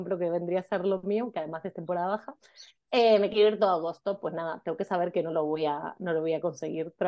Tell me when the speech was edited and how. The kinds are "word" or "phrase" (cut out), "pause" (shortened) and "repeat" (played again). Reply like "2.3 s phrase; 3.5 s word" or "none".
none